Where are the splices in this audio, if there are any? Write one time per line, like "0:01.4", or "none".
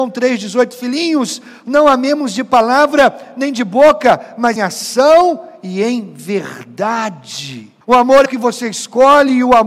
0:04.6
0:07.8
0:08.3